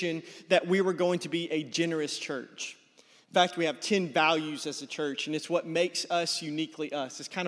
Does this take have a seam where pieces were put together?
no; 0 cuts

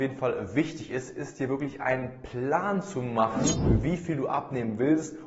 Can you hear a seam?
no; 0 cuts

